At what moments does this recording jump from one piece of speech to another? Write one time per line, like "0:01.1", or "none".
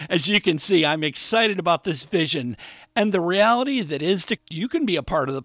0:04.4